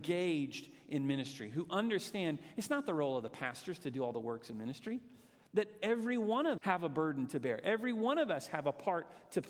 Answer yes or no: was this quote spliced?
yes